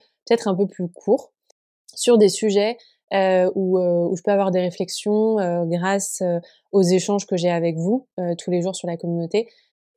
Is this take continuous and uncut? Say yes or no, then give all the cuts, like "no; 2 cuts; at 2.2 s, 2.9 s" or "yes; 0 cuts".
yes; 0 cuts